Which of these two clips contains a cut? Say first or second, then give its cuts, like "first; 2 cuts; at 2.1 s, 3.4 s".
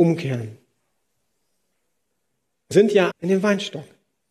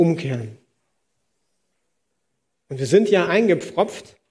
first; 2 cuts; at 2.7 s, 3.1 s